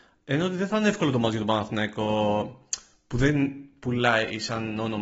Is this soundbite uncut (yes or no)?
yes